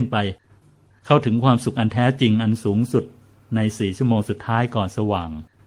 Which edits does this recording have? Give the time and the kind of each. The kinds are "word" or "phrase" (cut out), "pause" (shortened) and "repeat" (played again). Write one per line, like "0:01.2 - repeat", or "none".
none